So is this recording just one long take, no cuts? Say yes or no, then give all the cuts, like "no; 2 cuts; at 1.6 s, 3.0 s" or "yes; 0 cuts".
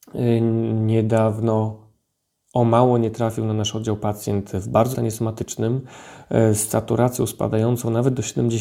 no; 1 cut; at 4.9 s